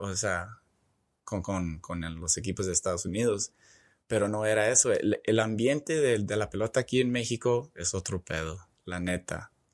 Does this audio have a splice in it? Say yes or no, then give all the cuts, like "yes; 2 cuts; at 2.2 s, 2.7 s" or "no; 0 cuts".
yes; 1 cut; at 8.7 s